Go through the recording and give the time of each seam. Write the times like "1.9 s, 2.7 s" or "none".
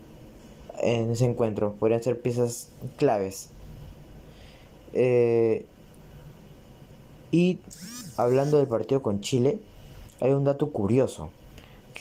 none